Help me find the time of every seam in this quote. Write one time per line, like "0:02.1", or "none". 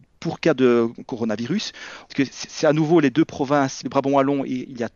0:02.1
0:02.4
0:03.8